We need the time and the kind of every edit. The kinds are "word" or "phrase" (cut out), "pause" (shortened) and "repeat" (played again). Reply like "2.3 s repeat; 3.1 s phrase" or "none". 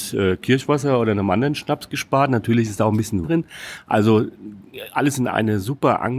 3.2 s word; 5.3 s word